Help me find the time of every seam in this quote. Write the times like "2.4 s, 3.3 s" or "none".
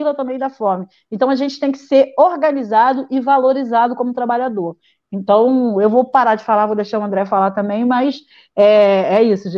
none